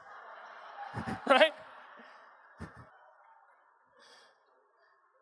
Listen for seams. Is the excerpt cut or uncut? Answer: cut